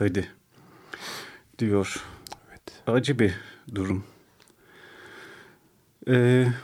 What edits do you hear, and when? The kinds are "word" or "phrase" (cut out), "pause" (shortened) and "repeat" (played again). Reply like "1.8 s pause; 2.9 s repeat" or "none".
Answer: 2.4 s pause